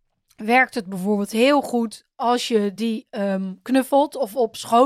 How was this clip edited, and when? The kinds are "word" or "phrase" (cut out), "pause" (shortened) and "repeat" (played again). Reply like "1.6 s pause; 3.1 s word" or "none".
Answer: none